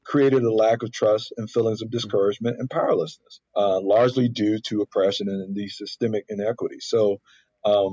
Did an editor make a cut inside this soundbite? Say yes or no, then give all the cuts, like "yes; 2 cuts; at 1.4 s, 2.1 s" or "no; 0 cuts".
yes; 1 cut; at 3.5 s